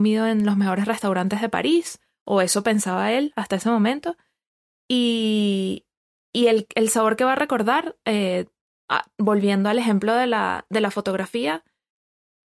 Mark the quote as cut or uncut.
uncut